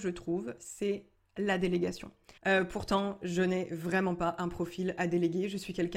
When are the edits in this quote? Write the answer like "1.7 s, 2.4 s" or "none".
2.4 s